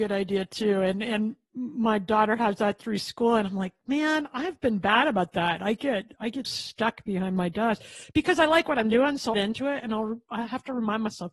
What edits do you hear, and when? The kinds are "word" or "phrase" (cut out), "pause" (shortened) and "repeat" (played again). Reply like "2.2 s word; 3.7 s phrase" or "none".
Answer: 6.4 s word; 9.3 s phrase